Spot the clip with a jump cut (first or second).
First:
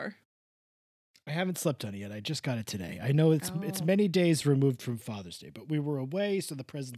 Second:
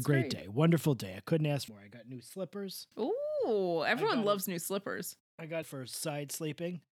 second